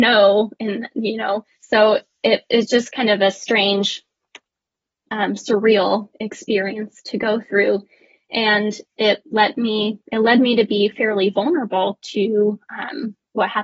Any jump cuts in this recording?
yes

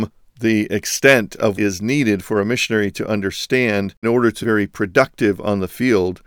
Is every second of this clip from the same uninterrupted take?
no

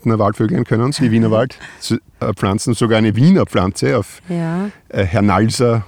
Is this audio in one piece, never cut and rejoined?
no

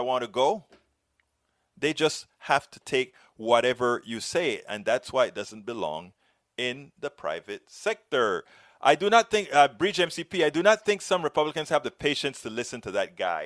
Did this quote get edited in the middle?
no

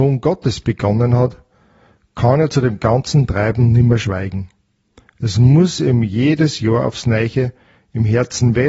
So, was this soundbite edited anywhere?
no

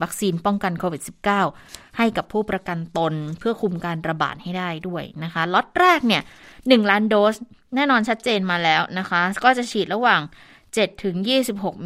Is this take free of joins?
yes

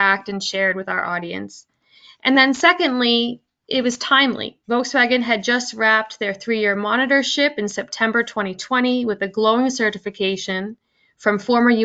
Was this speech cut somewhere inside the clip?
no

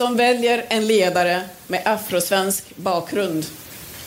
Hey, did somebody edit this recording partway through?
no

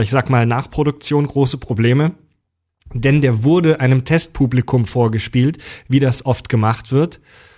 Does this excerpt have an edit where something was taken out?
no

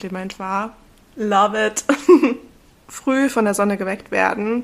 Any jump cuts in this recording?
no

